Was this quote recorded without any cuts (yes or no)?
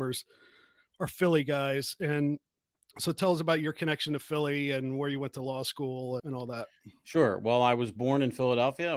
no